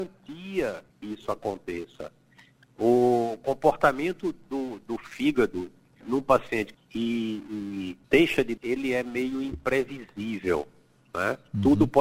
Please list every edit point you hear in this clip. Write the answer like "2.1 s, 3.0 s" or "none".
0.9 s, 4.8 s, 6.0 s, 6.7 s, 8.0 s, 8.6 s

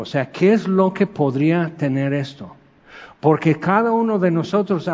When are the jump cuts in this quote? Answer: none

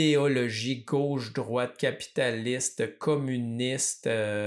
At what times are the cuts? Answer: none

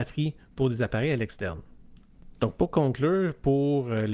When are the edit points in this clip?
none

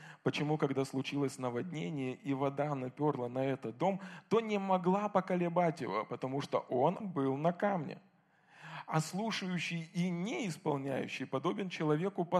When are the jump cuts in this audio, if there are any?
7.0 s

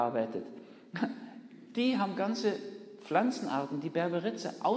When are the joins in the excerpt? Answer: none

